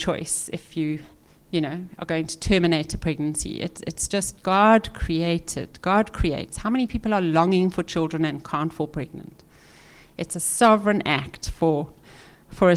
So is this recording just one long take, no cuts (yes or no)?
yes